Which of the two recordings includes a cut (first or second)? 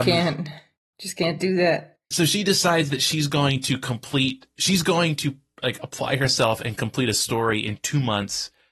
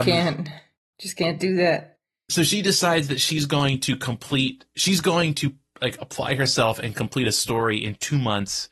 first